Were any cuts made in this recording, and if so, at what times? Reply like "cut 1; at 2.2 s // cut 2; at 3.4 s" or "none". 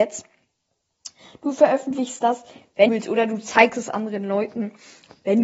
cut 1; at 2.9 s